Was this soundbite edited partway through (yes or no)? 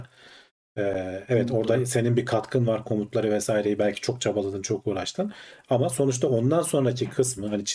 no